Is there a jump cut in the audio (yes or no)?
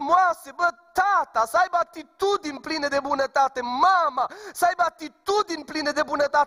no